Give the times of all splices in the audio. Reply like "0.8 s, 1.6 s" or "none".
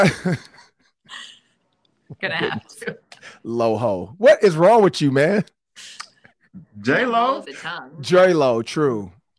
7.4 s